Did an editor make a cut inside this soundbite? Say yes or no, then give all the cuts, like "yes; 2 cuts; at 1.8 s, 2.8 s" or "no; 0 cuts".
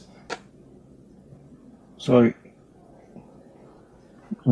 no; 0 cuts